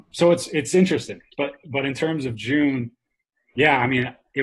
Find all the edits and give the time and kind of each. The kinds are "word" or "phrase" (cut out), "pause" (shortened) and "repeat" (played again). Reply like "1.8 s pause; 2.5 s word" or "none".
none